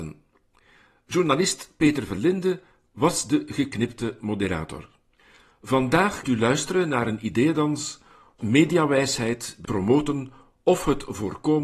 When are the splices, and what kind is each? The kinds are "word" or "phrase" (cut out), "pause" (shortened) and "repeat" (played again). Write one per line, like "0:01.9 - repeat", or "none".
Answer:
0:06.2 - word
0:08.4 - word
0:09.6 - word